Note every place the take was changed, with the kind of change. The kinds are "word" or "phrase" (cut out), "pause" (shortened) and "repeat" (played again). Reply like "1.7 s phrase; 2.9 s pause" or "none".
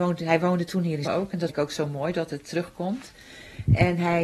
1.0 s word; 1.5 s word